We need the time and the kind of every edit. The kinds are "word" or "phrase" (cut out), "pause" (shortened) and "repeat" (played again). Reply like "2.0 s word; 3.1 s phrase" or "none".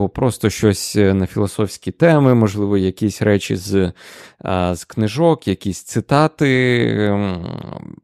none